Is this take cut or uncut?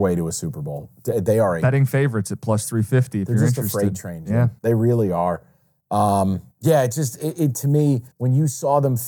cut